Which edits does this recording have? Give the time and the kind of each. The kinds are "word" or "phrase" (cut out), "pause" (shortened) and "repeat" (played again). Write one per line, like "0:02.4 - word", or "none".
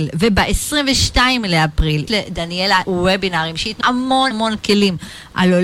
0:02.1 - word
0:02.8 - word
0:03.8 - word
0:04.3 - word